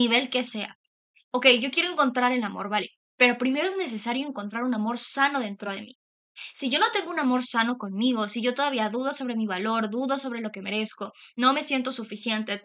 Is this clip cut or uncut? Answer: uncut